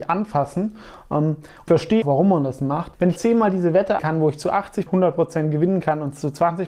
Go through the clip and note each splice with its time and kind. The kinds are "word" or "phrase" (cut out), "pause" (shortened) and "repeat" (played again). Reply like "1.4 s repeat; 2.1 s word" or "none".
1.7 s word; 2.0 s word; 3.2 s word; 4.0 s word; 4.9 s word